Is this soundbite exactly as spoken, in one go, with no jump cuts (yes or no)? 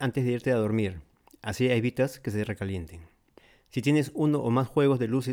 yes